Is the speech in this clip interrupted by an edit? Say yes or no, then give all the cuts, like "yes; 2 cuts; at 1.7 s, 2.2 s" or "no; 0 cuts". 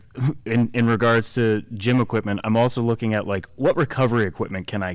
yes; 1 cut; at 3.5 s